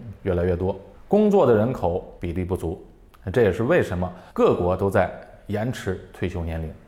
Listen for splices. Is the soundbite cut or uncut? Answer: cut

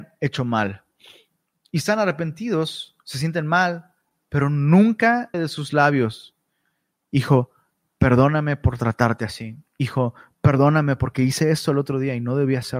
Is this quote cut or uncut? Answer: cut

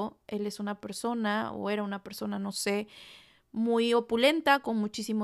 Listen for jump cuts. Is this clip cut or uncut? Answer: uncut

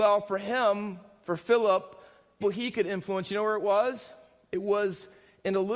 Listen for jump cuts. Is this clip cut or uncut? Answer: cut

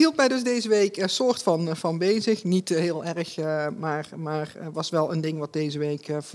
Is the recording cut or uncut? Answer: uncut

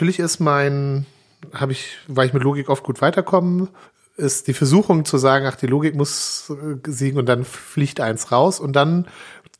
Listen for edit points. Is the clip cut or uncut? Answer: cut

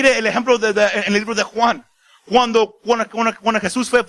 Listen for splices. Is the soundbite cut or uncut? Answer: uncut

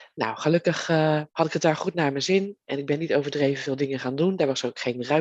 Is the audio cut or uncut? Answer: cut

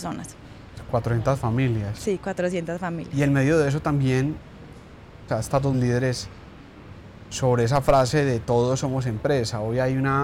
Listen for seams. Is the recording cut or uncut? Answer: cut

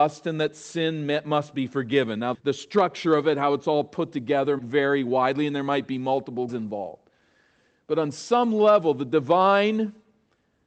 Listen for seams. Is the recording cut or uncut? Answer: cut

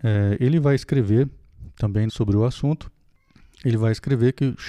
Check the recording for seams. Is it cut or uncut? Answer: cut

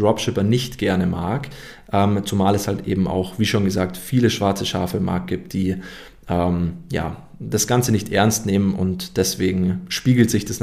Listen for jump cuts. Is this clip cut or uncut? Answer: uncut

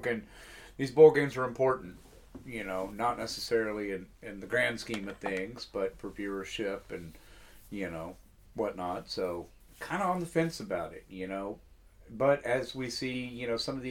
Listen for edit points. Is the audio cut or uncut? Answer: uncut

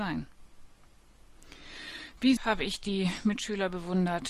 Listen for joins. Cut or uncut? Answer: cut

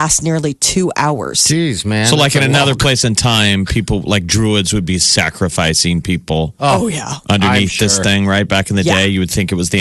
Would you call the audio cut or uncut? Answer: uncut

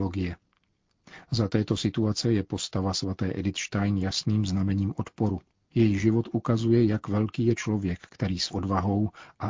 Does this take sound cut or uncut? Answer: cut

